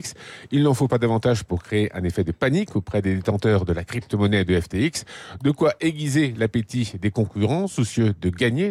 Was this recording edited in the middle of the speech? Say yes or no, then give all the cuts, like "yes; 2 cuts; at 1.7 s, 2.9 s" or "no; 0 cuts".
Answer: no; 0 cuts